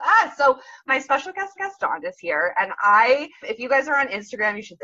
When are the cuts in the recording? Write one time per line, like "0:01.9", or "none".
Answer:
0:01.6
0:03.4